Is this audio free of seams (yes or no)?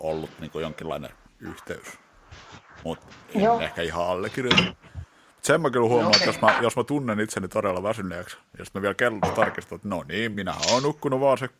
yes